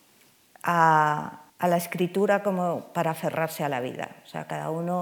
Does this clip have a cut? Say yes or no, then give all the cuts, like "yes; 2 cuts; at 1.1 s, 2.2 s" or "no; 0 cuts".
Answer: yes; 1 cut; at 1.5 s